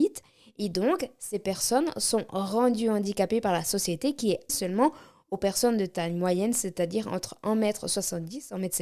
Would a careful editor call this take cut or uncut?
cut